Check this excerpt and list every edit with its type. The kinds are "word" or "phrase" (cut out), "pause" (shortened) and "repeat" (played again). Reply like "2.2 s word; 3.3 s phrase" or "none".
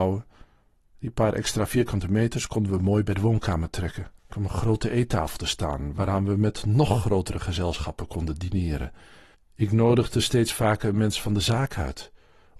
4.2 s pause; 9.3 s pause

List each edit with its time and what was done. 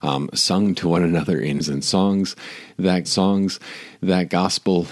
1.6 s word; 3.0 s repeat

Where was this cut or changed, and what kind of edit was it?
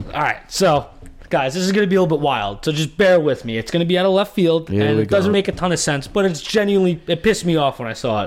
3.0 s word; 5.3 s word

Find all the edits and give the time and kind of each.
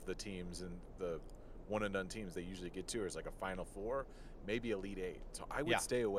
1.0 s word; 2.3 s phrase

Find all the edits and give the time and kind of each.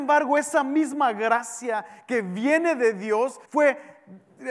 3.5 s pause

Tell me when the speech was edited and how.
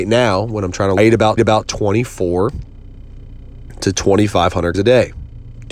1.0 s phrase; 1.4 s repeat; 4.7 s word

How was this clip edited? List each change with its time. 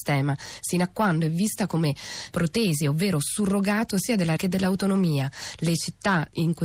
2.3 s word; 4.4 s word

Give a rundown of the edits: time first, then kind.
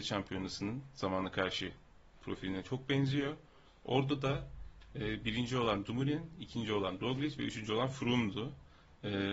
none

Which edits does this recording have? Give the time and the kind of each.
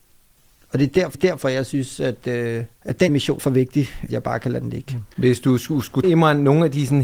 1.1 s repeat; 2.8 s pause; 3.1 s word; 3.4 s word; 4.1 s phrase; 5.1 s pause; 6.0 s word

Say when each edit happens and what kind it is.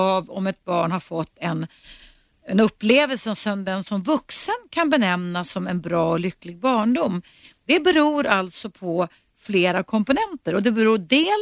none

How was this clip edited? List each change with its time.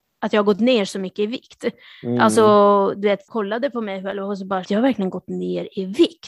4.6 s word

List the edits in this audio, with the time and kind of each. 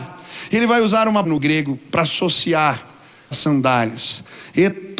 1.2 s word; 3.3 s word

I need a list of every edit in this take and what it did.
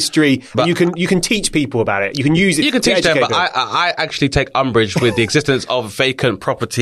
none

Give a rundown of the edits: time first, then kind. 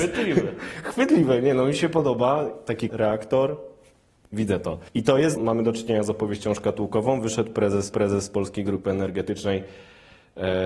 2.9 s word; 4.9 s pause; 5.4 s phrase; 7.9 s repeat

